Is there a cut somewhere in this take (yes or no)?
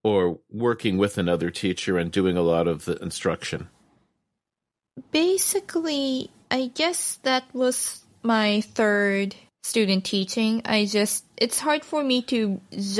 yes